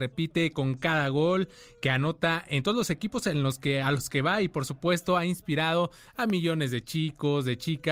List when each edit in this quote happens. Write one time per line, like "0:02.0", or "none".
none